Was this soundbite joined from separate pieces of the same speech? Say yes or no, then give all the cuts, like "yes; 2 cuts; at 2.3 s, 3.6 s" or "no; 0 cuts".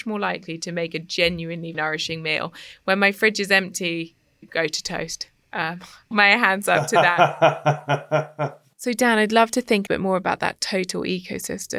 yes; 5 cuts; at 1.7 s, 4.4 s, 6.1 s, 8.7 s, 9.9 s